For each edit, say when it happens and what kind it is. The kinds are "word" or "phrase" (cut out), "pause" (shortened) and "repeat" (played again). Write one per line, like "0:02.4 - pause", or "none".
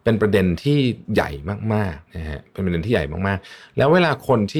0:02.1 - pause